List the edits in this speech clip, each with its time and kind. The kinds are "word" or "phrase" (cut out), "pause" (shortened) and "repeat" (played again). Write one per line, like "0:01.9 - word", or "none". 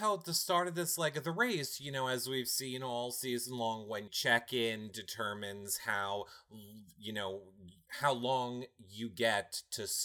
0:04.1 - word